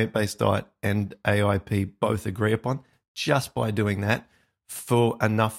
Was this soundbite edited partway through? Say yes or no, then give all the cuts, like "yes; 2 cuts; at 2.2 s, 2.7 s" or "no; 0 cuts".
no; 0 cuts